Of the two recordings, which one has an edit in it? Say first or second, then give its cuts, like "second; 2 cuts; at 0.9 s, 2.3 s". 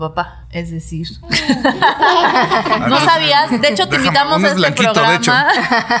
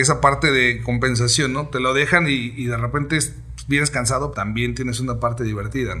second; 1 cut; at 4.3 s